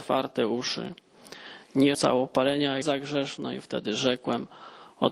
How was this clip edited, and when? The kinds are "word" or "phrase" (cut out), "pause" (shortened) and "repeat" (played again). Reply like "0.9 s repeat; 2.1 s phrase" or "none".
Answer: 1.9 s word; 2.8 s word